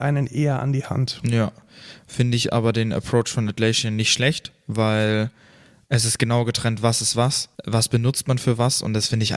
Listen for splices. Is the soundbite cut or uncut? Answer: cut